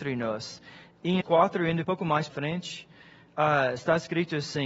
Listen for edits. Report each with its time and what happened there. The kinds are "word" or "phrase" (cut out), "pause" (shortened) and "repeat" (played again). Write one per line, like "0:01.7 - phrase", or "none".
0:01.2 - word
0:01.8 - word
0:02.3 - word